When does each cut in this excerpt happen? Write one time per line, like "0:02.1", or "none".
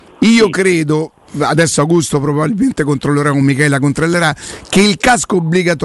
none